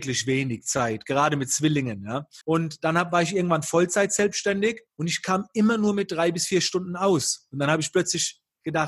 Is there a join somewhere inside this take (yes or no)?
yes